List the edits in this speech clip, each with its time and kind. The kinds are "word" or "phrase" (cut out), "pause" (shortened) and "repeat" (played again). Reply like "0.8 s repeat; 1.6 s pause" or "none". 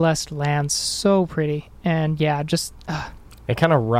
none